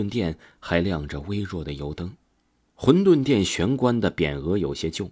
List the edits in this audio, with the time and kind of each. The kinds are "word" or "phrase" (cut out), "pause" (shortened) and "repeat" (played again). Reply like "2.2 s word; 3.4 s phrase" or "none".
2.3 s pause